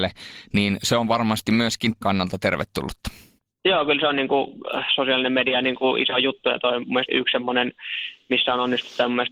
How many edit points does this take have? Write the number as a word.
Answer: three